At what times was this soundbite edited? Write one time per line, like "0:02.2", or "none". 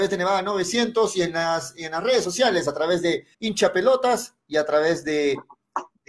0:03.3